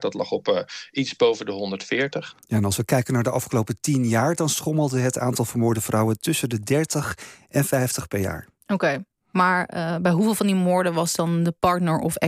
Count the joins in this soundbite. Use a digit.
0